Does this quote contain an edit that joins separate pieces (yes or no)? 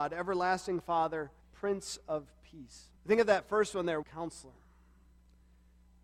yes